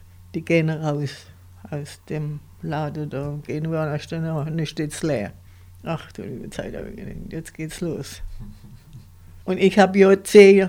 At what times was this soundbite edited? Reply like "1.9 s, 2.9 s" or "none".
5.5 s, 9.4 s

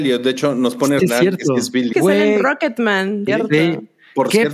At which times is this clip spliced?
1.0 s, 1.9 s, 3.3 s

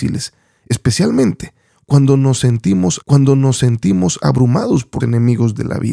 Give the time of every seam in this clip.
3.0 s, 5.0 s

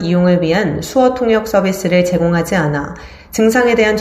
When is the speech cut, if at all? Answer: none

